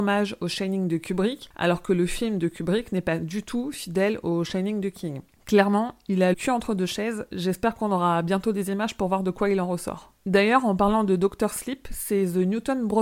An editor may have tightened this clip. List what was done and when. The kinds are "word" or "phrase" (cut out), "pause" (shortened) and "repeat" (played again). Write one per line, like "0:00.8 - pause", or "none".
0:06.3 - word
0:10.2 - pause